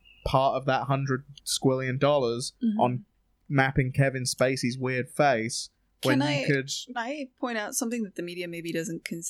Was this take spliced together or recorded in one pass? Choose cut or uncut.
cut